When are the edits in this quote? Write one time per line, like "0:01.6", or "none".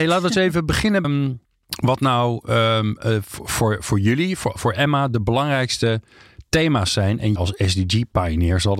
0:01.0
0:01.4
0:07.4